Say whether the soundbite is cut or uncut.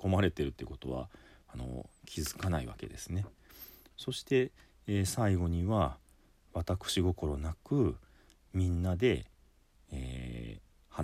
uncut